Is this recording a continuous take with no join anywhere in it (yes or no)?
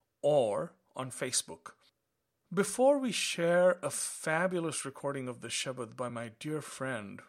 yes